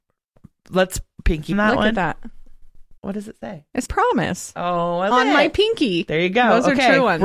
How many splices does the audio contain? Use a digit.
4